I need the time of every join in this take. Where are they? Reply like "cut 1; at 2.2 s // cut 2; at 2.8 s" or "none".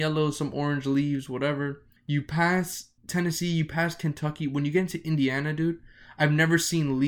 cut 1; at 2.0 s // cut 2; at 3.0 s